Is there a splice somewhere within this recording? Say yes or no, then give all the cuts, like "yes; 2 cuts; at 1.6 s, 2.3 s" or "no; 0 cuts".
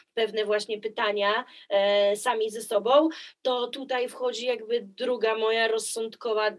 no; 0 cuts